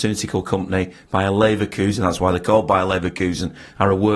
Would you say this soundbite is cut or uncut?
uncut